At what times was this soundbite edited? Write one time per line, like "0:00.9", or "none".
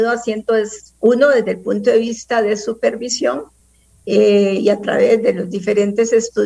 none